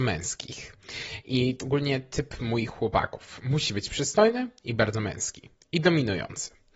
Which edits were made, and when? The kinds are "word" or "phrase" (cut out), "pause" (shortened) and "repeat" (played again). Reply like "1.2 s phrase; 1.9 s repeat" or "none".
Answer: 1.6 s word